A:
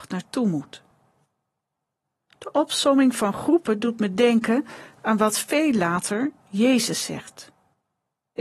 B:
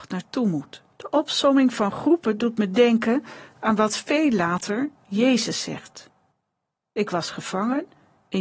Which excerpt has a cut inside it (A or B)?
B